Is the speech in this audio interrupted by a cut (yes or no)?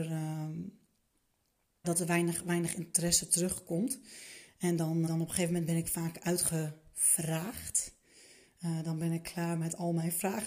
yes